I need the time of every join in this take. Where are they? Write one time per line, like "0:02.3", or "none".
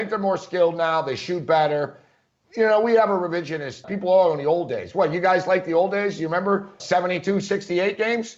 0:03.8
0:06.8